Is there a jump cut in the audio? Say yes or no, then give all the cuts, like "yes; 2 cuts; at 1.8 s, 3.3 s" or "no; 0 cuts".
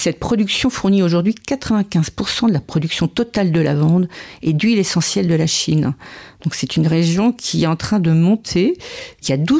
no; 0 cuts